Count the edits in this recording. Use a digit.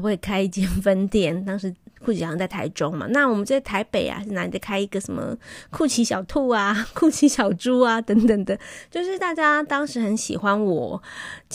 1